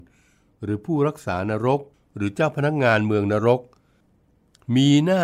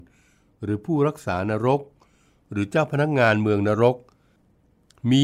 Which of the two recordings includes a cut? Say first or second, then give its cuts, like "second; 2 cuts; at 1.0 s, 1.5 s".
first; 1 cut; at 1.9 s